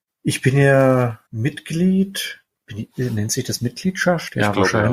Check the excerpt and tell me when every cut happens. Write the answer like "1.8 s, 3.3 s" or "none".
1.3 s